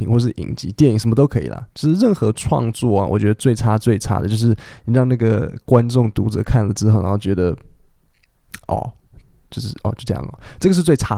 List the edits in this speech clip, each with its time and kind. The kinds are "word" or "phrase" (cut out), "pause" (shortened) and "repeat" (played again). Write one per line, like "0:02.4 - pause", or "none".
none